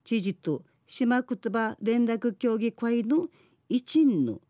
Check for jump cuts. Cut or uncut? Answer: uncut